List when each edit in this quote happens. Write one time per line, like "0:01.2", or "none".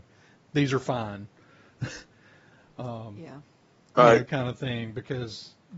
none